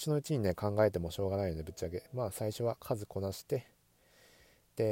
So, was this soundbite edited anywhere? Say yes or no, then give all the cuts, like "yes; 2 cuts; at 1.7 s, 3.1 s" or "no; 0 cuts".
yes; 1 cut; at 2.1 s